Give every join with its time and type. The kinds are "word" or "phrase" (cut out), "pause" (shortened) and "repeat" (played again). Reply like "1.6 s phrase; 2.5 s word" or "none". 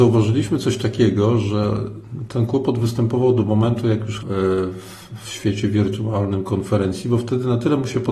4.2 s phrase